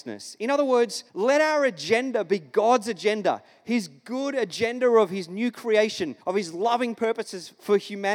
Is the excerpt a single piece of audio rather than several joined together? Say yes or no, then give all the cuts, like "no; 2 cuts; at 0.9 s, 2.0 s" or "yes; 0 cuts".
no; 2 cuts; at 1.1 s, 6.2 s